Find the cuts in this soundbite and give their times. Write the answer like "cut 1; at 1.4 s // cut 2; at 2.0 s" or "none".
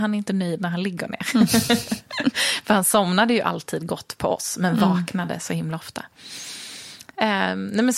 none